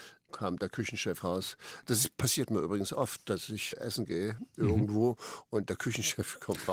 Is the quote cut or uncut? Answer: cut